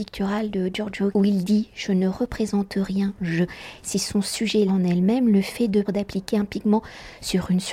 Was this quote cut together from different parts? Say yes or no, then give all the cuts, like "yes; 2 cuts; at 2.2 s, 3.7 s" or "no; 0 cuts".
yes; 4 cuts; at 1.1 s, 3.5 s, 4.7 s, 5.8 s